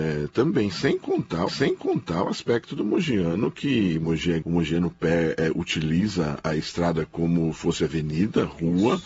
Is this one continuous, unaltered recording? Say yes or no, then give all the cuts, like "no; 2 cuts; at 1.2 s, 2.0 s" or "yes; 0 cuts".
no; 3 cuts; at 1.5 s, 4.4 s, 7.5 s